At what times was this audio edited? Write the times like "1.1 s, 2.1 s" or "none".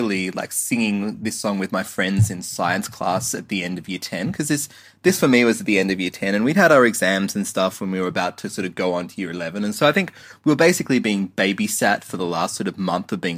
none